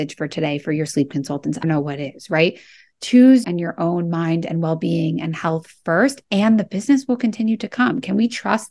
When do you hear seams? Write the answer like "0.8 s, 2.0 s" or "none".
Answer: 1.6 s, 3.4 s